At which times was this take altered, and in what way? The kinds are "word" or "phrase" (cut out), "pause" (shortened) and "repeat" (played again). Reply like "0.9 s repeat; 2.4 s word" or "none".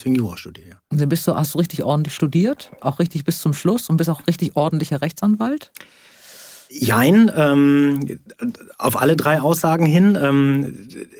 none